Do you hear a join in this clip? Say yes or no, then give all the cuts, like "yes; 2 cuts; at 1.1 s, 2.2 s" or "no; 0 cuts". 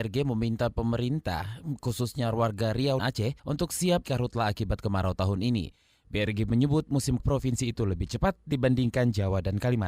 yes; 4 cuts; at 3.0 s, 3.4 s, 4.0 s, 7.2 s